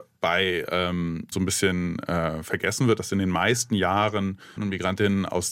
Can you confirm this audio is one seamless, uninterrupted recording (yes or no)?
no